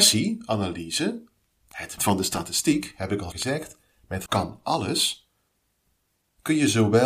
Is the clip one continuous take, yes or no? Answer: no